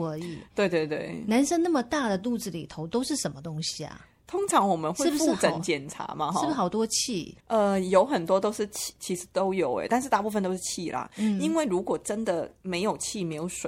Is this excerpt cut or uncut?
cut